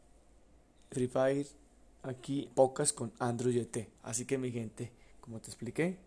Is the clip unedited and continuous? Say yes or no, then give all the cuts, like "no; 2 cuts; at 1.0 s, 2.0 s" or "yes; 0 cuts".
no; 3 cuts; at 0.9 s, 2.5 s, 4.0 s